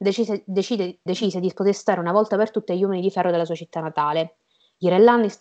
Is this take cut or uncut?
cut